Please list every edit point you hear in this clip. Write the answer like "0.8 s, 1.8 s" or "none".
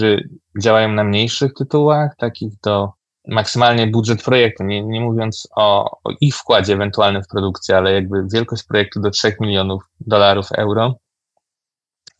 3.0 s